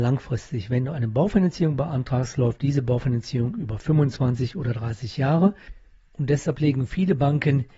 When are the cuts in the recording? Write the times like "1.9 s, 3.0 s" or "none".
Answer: none